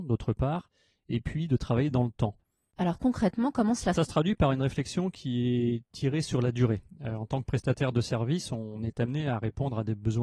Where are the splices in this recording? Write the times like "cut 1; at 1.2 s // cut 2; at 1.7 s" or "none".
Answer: cut 1; at 3.9 s